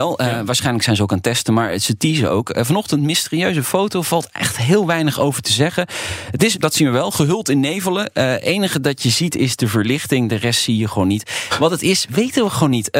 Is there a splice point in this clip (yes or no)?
yes